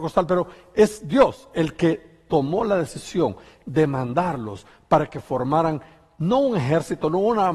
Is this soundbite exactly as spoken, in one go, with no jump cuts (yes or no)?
yes